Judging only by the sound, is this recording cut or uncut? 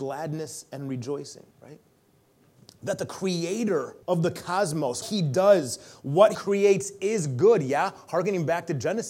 cut